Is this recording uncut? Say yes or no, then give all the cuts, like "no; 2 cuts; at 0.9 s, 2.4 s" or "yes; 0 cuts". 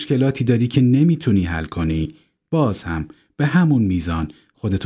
yes; 0 cuts